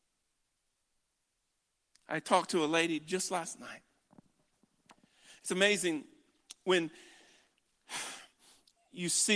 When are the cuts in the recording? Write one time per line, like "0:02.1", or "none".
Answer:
none